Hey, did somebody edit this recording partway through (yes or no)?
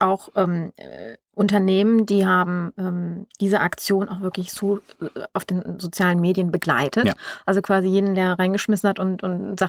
no